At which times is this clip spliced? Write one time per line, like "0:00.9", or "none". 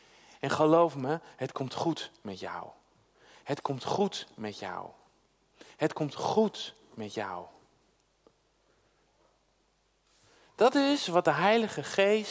none